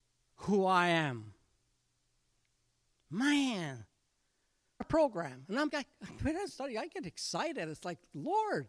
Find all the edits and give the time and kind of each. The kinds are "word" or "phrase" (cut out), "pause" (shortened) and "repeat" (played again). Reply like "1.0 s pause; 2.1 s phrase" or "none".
4.8 s word; 5.7 s word; 6.5 s word